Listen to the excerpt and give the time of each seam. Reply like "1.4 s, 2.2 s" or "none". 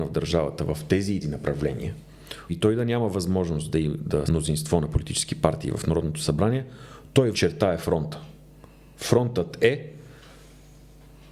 1.2 s, 2.5 s, 4.3 s, 7.3 s